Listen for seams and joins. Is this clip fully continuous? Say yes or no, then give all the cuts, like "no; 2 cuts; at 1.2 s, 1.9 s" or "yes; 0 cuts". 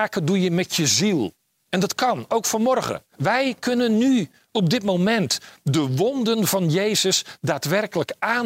no; 2 cuts; at 1.6 s, 3.1 s